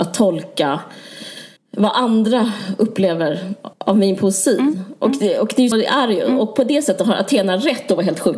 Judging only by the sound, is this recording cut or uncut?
cut